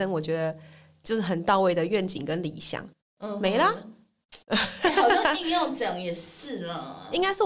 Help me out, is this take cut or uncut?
cut